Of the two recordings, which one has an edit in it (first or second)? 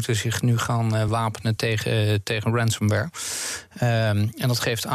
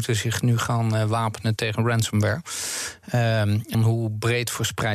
second